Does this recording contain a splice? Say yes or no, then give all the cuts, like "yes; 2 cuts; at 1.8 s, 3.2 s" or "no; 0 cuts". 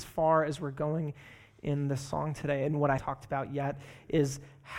yes; 1 cut; at 3.0 s